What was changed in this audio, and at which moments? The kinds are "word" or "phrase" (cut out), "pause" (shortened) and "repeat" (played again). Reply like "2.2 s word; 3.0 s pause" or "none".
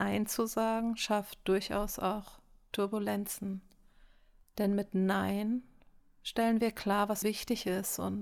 7.2 s word